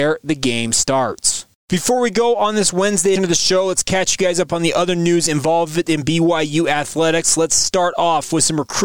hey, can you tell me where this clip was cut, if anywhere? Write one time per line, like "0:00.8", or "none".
0:03.2